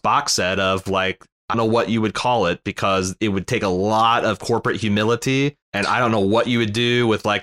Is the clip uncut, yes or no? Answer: no